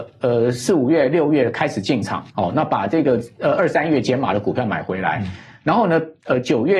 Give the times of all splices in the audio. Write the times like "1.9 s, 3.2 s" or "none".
2.3 s